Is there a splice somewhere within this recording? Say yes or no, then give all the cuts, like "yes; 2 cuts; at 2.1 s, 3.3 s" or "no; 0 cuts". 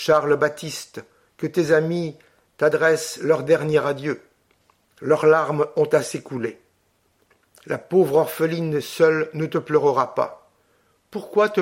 no; 0 cuts